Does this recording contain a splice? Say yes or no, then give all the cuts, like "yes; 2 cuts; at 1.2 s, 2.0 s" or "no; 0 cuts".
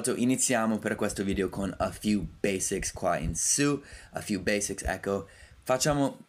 no; 0 cuts